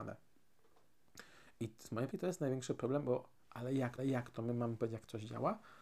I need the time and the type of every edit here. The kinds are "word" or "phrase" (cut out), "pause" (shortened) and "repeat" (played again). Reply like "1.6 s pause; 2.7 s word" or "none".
2.1 s word; 4.0 s repeat